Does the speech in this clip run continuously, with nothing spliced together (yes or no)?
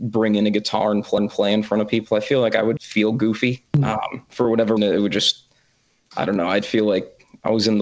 no